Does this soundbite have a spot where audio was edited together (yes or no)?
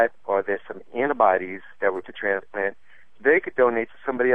yes